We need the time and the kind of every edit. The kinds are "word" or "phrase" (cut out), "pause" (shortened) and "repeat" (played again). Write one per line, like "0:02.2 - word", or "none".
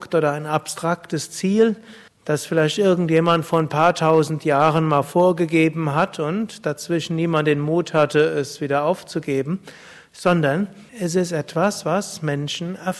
0:02.1 - pause
0:10.9 - pause